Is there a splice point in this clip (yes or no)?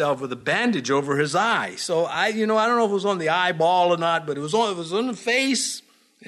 no